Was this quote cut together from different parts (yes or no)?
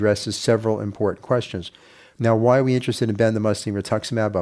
no